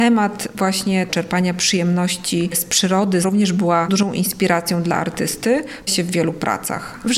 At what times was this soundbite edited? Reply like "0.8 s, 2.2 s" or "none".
1.1 s, 3.2 s, 3.9 s, 5.9 s